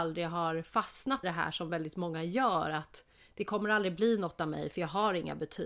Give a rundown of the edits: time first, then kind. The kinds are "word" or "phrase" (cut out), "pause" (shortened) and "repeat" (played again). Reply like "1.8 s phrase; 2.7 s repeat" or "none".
1.2 s word